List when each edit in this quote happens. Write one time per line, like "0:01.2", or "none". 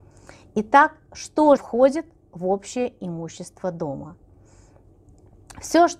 0:01.6